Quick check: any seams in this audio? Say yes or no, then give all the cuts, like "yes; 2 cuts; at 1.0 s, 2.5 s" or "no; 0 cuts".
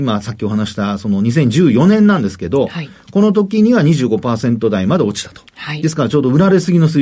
no; 0 cuts